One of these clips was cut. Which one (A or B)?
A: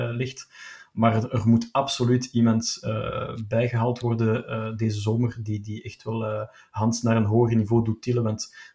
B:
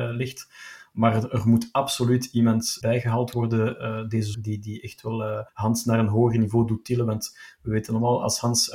B